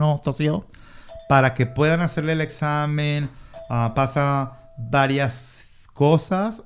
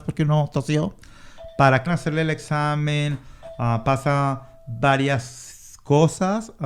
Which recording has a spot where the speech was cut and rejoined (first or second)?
second